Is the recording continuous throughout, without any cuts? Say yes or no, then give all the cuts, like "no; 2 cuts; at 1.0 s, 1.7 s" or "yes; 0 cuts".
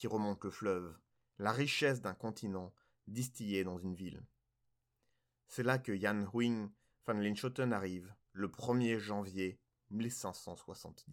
yes; 0 cuts